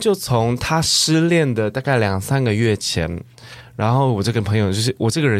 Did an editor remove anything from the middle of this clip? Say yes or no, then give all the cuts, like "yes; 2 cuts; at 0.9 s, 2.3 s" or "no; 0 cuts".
no; 0 cuts